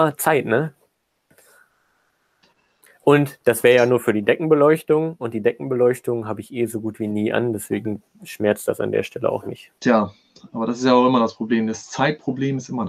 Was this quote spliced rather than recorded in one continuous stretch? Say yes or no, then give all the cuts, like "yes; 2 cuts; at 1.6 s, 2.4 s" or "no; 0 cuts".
yes; 1 cut; at 9.8 s